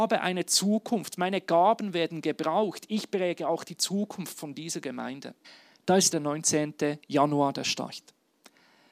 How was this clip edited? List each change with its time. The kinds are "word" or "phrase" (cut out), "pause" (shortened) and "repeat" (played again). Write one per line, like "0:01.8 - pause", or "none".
0:05.4 - pause
0:06.1 - word